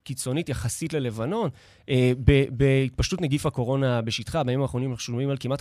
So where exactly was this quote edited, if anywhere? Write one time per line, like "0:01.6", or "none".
none